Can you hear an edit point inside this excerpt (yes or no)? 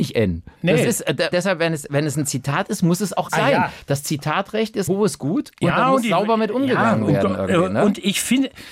yes